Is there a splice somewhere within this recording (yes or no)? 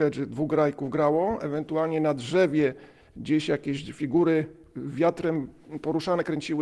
no